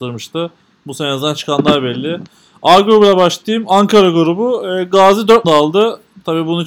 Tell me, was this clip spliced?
yes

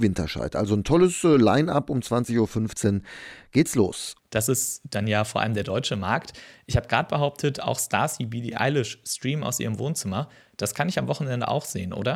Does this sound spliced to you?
no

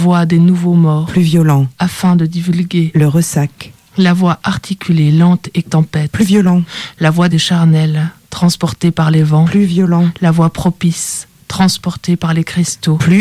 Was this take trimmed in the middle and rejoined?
yes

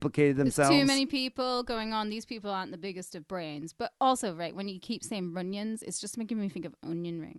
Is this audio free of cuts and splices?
yes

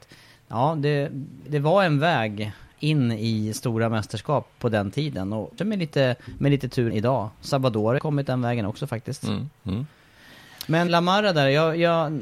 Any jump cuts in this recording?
yes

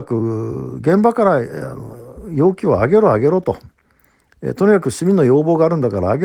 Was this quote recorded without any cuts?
yes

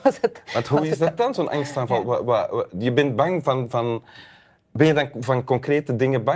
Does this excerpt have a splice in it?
no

